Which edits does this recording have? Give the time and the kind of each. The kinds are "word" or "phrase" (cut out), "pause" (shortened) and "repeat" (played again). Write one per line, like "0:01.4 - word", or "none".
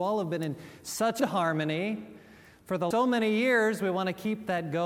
0:01.2 - word
0:02.9 - word